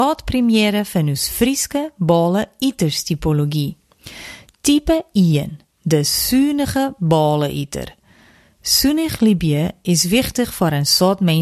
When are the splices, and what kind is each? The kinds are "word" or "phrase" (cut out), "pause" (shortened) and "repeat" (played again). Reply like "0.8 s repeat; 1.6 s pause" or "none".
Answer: none